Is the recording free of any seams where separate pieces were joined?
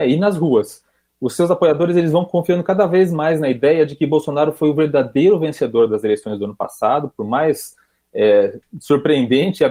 yes; 0 cuts

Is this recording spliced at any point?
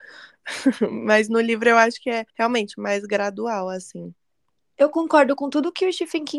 yes; 1 cut; at 2.3 s

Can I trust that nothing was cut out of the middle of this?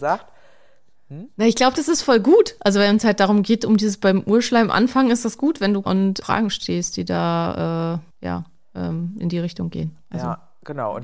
no; 3 cuts; at 5.8 s, 6.2 s, 8.1 s

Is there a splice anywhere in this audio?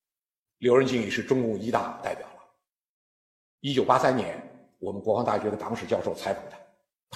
no; 0 cuts

